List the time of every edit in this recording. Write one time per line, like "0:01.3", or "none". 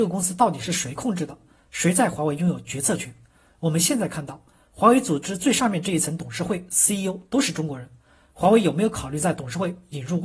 none